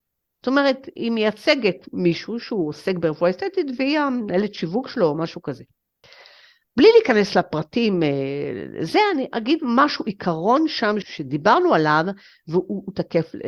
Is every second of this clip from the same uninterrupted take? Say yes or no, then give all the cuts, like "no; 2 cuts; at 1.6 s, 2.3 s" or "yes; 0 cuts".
no; 1 cut; at 11.0 s